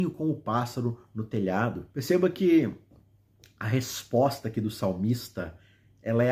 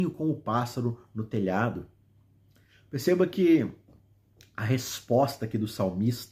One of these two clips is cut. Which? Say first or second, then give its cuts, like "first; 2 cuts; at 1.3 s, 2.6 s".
first; 1 cut; at 1.9 s